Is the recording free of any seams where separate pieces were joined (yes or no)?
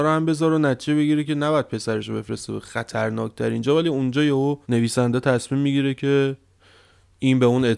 no